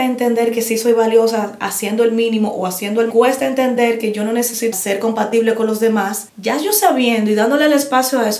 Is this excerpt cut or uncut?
cut